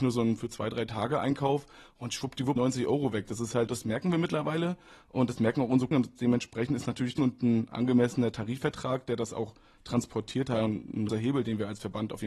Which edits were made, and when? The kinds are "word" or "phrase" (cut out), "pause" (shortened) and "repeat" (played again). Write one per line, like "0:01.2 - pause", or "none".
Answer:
0:02.6 - word
0:03.7 - word
0:05.9 - word
0:07.2 - word
0:11.1 - word